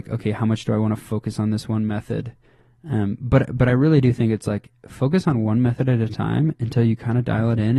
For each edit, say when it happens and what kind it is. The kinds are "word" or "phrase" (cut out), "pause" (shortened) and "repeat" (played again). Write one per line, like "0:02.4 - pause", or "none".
none